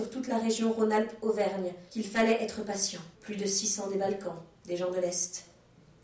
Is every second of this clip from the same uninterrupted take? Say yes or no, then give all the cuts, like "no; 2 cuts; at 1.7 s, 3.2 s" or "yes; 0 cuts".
no; 2 cuts; at 1.9 s, 3.1 s